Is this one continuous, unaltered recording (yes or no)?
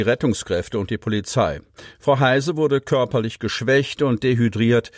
yes